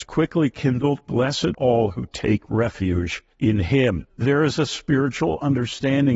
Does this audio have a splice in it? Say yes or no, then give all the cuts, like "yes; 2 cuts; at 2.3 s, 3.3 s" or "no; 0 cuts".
yes; 3 cuts; at 1.5 s, 3.3 s, 4.1 s